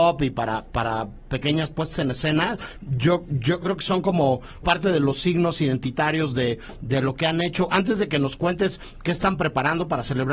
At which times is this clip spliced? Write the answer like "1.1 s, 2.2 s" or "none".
3.6 s, 4.6 s